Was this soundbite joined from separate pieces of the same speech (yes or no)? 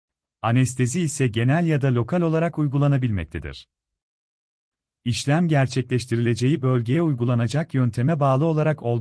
no